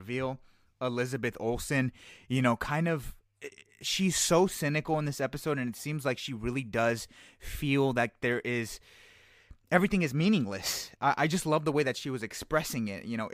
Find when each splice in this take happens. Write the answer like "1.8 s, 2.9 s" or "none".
none